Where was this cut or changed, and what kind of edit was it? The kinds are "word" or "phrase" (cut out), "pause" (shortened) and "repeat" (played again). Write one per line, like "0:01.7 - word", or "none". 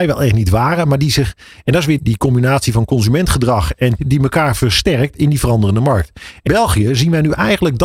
0:02.0 - word
0:04.0 - word
0:06.5 - word

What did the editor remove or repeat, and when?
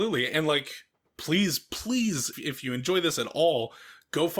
0:02.3 - word

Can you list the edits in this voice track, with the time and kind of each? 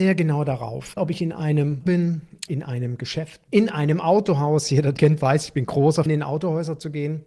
0:01.0 - word
0:01.9 - word
0:02.5 - word
0:03.5 - word
0:05.0 - word
0:06.1 - word

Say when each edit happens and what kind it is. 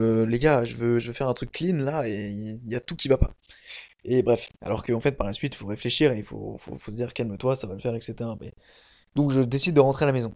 none

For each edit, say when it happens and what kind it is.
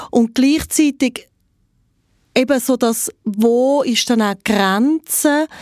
none

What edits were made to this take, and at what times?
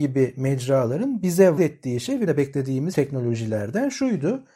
0:01.6 - word
0:02.3 - word
0:02.9 - phrase

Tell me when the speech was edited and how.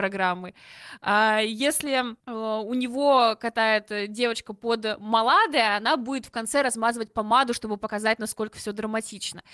0:02.2 - pause

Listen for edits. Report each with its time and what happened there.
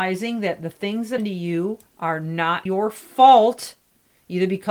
0:01.2 - word
0:01.9 - pause
0:02.7 - word

